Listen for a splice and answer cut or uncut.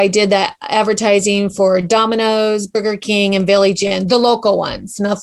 uncut